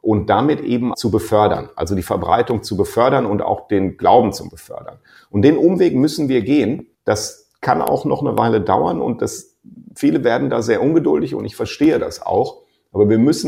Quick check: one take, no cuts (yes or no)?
no